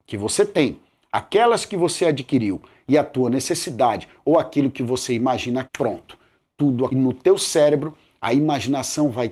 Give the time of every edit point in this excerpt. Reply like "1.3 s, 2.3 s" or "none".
5.6 s, 6.9 s